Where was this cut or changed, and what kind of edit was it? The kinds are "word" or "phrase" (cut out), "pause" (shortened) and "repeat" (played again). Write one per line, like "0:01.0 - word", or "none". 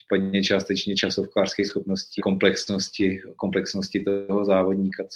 0:02.2 - phrase